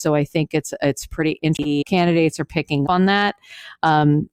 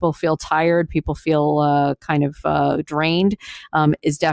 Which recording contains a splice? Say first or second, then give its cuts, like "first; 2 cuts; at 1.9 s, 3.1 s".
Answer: first; 2 cuts; at 1.8 s, 2.9 s